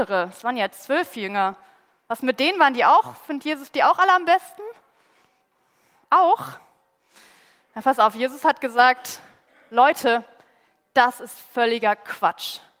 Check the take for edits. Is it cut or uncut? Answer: uncut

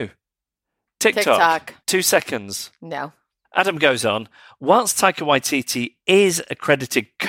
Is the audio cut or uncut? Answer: cut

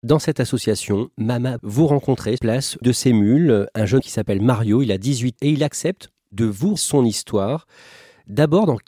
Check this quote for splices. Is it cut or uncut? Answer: cut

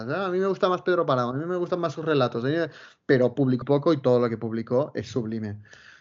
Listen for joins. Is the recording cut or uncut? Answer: cut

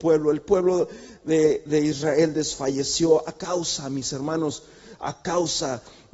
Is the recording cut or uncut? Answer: uncut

